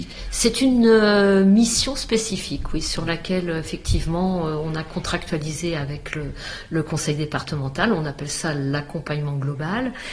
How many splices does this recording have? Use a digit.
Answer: 0